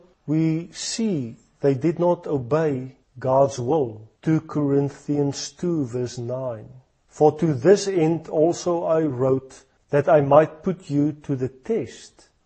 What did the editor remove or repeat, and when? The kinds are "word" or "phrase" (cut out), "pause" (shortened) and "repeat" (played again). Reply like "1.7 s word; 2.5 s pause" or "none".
4.2 s pause